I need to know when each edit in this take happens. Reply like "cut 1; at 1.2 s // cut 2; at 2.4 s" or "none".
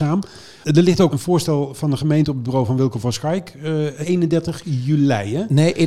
cut 1; at 1.1 s // cut 2; at 4.0 s

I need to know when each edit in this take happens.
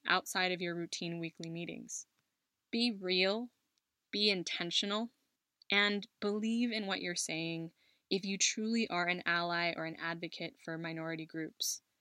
none

